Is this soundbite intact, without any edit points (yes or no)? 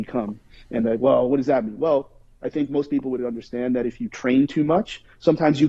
yes